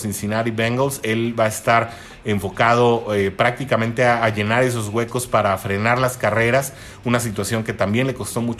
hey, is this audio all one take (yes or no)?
yes